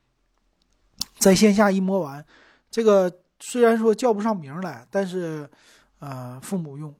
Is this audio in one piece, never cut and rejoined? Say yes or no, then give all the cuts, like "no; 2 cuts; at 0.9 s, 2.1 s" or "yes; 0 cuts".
yes; 0 cuts